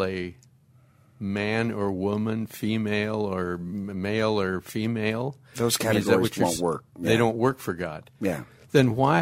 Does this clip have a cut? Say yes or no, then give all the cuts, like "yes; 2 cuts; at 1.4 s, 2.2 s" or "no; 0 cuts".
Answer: no; 0 cuts